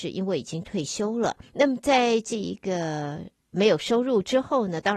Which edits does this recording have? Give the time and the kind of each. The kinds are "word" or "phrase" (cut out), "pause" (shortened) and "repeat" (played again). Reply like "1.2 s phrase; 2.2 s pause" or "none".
1.4 s pause

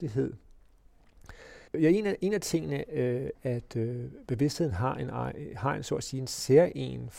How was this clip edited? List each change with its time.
1.7 s pause; 3.3 s word

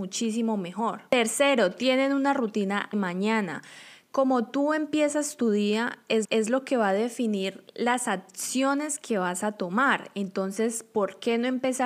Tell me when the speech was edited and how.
2.9 s word; 6.2 s repeat

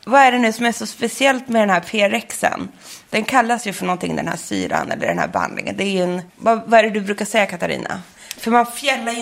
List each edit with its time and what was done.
6.3 s pause

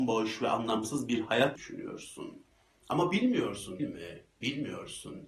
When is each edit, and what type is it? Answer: 1.6 s word; 3.8 s word

